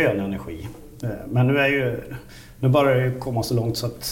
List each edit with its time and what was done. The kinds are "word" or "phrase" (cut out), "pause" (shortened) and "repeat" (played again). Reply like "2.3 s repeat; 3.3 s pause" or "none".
none